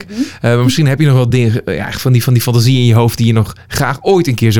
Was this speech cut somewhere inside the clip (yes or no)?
no